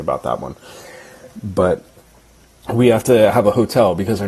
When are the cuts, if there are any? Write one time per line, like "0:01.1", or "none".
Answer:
none